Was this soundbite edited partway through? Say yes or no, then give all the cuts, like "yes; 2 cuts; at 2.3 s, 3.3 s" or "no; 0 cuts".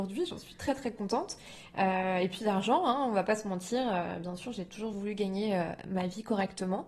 no; 0 cuts